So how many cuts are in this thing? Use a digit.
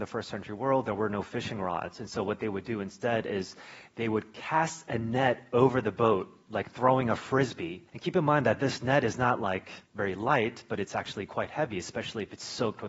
2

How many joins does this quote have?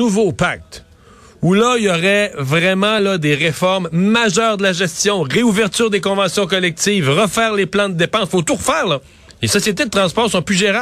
0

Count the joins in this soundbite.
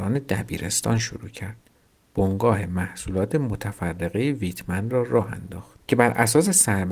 1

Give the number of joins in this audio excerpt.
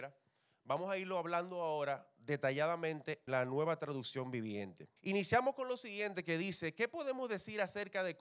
2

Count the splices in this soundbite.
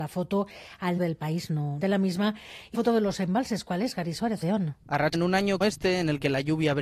7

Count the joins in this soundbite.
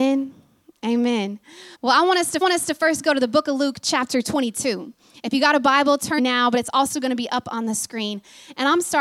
3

